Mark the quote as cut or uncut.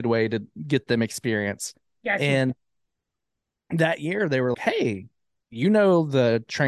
cut